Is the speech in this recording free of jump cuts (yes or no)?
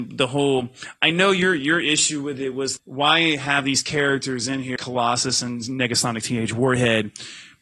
no